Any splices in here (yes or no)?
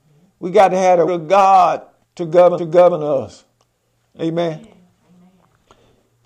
yes